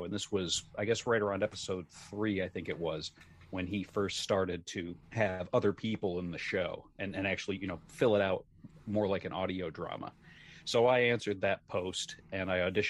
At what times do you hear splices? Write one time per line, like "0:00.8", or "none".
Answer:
0:05.0